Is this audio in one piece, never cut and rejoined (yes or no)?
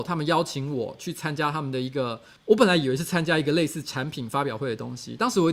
no